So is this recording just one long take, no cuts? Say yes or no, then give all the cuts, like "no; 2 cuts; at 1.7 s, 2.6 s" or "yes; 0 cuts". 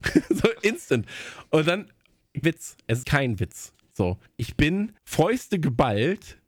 no; 4 cuts; at 2.4 s, 3.0 s, 4.3 s, 5.0 s